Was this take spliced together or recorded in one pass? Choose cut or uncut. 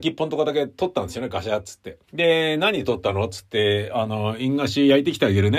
cut